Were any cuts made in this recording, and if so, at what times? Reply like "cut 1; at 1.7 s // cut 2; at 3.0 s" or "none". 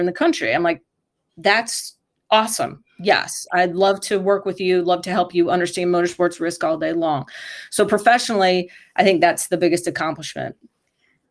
none